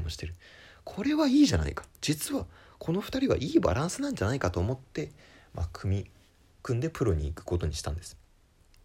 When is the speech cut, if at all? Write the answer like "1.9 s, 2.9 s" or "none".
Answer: none